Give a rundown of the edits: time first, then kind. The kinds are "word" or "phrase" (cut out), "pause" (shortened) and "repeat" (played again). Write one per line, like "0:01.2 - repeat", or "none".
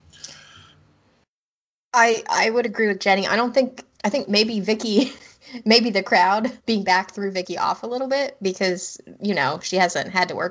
0:03.9 - pause
0:06.6 - pause